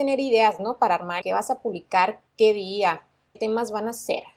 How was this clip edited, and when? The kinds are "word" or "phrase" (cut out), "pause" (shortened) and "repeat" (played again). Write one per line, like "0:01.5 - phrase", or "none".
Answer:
0:01.2 - phrase
0:02.3 - pause
0:03.4 - word